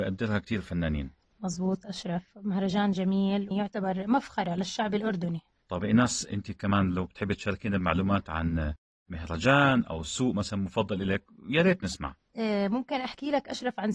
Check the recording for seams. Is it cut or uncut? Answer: cut